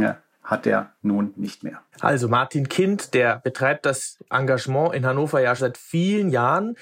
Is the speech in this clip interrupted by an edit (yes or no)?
yes